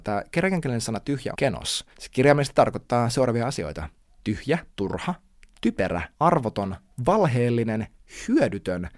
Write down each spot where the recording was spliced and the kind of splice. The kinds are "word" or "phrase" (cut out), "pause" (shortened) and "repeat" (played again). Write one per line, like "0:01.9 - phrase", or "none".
0:01.3 - word
0:01.9 - pause
0:04.7 - pause
0:06.1 - pause